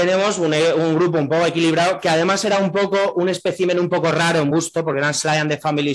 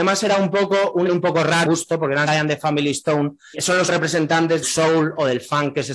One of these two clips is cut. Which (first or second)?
second